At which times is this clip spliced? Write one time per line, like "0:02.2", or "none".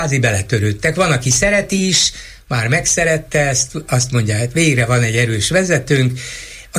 none